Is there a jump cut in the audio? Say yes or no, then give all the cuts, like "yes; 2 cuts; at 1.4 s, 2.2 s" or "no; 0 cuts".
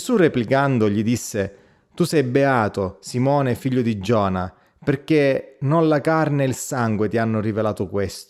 no; 0 cuts